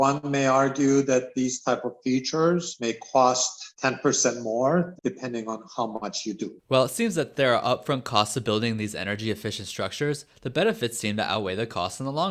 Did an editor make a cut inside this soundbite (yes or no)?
yes